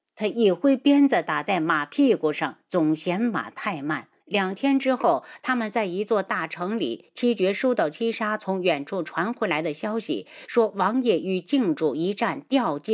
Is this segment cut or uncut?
cut